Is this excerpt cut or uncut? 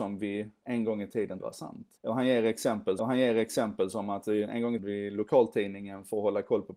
cut